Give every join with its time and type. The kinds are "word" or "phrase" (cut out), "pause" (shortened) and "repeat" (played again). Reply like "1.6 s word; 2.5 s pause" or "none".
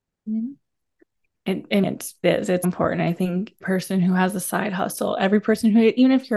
1.8 s word; 2.2 s word; 2.6 s word; 3.6 s word